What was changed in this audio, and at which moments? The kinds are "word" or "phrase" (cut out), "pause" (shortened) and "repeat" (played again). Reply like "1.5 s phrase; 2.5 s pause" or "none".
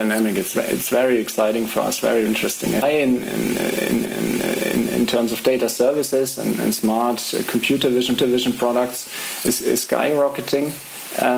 2.3 s word; 2.8 s phrase; 4.0 s repeat; 8.2 s repeat